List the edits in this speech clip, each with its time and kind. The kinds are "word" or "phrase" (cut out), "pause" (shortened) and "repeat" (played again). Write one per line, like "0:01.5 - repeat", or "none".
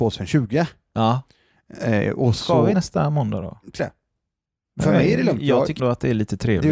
0:02.7 - phrase
0:03.8 - word
0:05.8 - word